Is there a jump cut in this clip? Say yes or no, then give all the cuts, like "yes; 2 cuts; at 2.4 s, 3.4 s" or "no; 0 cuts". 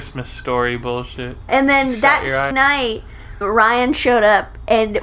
yes; 3 cuts; at 1.5 s, 2.5 s, 3.4 s